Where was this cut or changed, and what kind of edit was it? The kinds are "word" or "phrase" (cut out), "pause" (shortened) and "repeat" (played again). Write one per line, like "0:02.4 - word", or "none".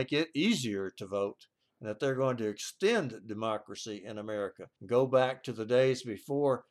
0:04.8 - pause